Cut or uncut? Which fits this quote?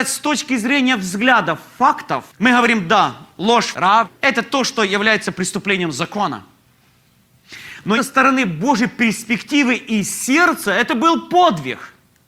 uncut